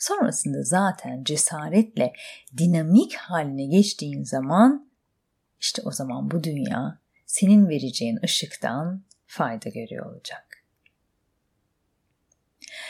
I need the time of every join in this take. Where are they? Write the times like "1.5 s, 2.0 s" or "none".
none